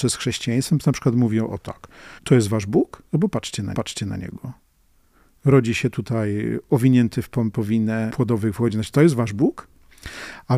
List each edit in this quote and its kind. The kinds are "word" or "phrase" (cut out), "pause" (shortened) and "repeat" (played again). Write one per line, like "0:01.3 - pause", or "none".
0:02.2 - pause
0:03.1 - pause
0:03.7 - repeat
0:08.1 - phrase